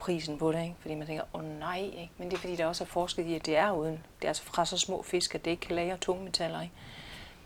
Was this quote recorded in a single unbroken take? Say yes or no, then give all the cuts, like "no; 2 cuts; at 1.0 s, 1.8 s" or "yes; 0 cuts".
no; 1 cut; at 4.1 s